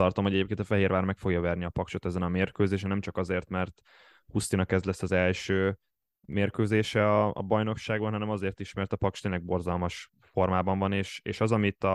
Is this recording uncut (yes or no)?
yes